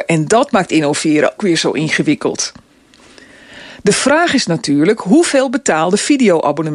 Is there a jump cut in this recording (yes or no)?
yes